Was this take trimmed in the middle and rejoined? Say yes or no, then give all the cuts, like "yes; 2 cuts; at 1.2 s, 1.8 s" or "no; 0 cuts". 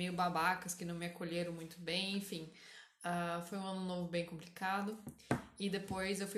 no; 0 cuts